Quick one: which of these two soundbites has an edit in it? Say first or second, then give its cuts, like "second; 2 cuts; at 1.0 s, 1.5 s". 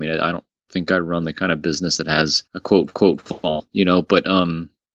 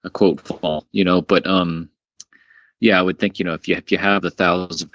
first; 2 cuts; at 2.5 s, 2.9 s